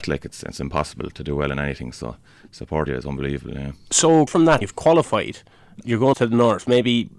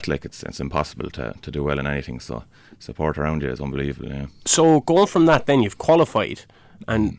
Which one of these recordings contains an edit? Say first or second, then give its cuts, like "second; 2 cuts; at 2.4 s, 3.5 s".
first; 6 cuts; at 1.1 s, 2.9 s, 4.3 s, 4.6 s, 5.8 s, 6.1 s